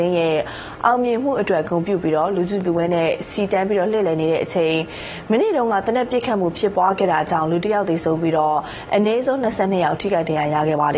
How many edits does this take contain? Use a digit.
0